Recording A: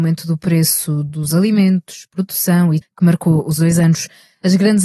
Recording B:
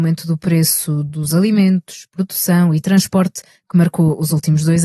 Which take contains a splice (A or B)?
A